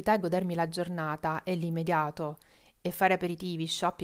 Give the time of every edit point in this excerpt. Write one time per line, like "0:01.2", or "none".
none